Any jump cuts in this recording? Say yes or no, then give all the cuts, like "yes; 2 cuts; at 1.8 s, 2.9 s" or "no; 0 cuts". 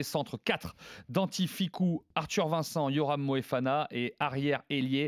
no; 0 cuts